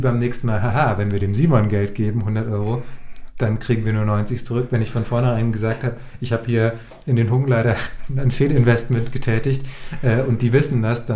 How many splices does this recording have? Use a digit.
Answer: 0